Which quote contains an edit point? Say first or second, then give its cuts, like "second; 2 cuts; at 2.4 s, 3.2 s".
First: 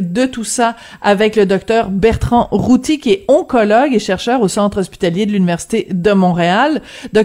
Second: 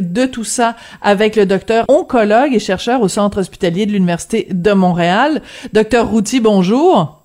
second; 1 cut; at 1.9 s